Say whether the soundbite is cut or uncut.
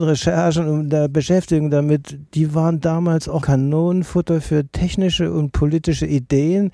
cut